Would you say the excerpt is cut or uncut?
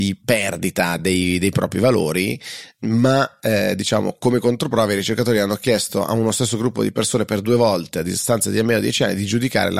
uncut